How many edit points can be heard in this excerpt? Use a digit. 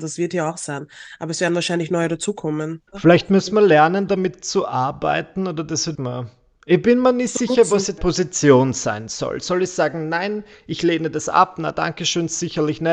3